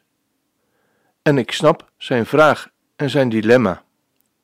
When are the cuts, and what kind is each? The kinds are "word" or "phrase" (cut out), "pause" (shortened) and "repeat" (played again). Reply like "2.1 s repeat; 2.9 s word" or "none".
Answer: none